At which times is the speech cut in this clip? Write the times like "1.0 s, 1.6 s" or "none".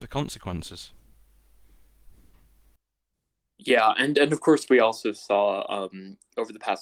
none